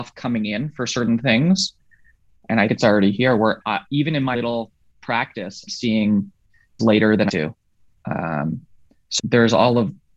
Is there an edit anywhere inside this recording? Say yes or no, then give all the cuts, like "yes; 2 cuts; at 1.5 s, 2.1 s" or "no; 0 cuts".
yes; 7 cuts; at 2.7 s, 3.6 s, 4.3 s, 5.7 s, 6.8 s, 7.3 s, 9.2 s